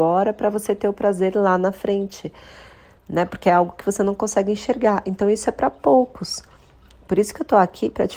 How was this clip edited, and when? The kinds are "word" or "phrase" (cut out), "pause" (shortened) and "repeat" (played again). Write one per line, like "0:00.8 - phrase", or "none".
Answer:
none